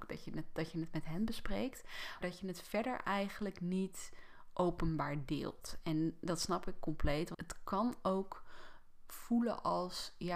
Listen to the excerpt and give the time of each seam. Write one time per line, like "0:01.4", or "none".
0:02.2
0:07.3